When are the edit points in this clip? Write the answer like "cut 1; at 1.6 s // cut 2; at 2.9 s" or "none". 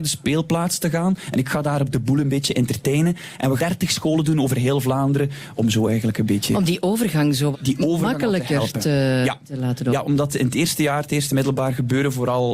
cut 1; at 3.6 s // cut 2; at 7.5 s